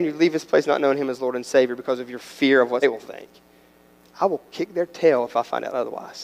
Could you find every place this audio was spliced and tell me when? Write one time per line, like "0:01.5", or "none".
0:02.8